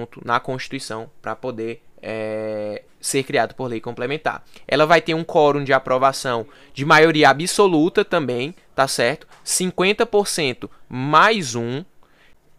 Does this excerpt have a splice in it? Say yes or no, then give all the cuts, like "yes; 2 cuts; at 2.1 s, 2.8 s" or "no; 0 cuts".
no; 0 cuts